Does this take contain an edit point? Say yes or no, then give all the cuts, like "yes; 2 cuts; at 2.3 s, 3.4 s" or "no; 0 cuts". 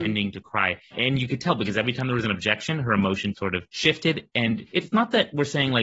yes; 1 cut; at 3.3 s